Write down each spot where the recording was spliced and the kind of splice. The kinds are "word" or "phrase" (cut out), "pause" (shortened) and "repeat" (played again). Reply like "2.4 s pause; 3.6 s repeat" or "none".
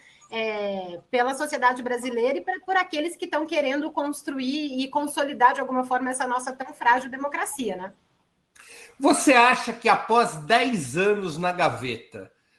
none